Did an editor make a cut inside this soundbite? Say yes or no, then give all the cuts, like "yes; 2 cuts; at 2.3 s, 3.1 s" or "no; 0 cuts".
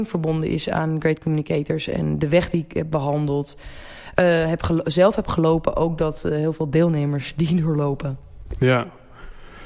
no; 0 cuts